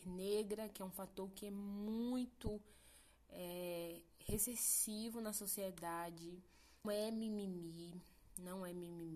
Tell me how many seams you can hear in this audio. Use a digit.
1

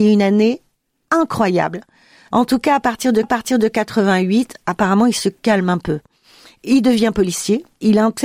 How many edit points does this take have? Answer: 1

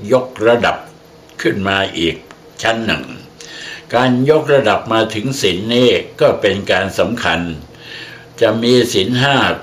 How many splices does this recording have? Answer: 0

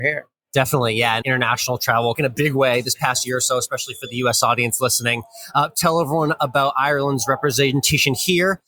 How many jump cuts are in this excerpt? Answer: 2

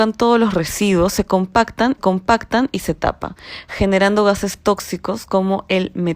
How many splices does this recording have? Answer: 1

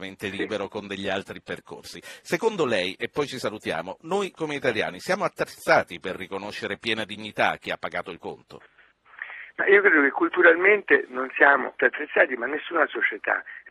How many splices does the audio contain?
2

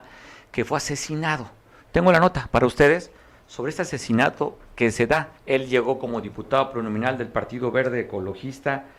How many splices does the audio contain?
1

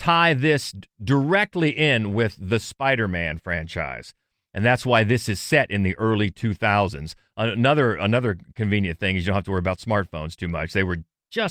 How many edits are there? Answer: 0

